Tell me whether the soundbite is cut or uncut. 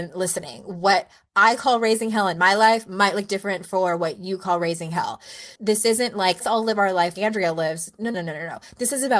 cut